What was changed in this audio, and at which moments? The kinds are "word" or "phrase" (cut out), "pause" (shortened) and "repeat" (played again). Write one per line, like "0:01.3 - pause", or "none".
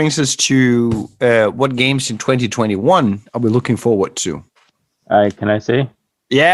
none